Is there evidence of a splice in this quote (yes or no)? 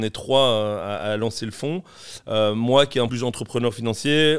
yes